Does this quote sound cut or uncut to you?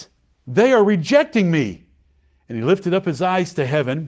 uncut